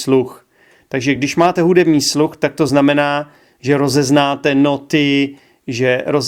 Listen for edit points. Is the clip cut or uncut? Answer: uncut